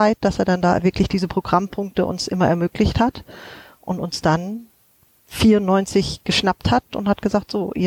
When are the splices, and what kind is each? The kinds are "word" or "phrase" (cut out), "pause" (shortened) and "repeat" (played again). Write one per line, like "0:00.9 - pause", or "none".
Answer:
none